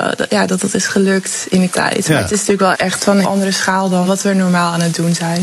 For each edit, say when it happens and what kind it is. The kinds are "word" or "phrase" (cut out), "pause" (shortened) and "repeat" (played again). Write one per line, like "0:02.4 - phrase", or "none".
0:01.7 - word
0:02.7 - word
0:03.2 - word
0:04.0 - word